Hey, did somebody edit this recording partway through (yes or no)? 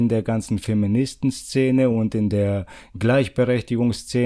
no